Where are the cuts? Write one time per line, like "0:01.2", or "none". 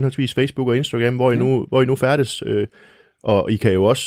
none